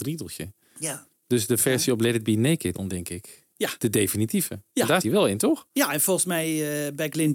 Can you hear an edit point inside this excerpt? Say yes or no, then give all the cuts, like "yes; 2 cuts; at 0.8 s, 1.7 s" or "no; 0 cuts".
yes; 3 cuts; at 2.7 s, 3.5 s, 5.0 s